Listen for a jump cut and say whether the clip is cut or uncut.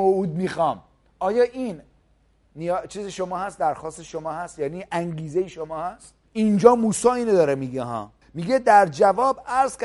cut